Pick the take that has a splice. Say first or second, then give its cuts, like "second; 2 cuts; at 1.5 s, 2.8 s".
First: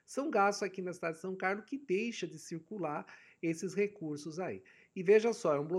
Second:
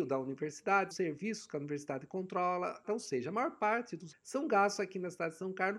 second; 3 cuts; at 0.9 s, 2.8 s, 4.1 s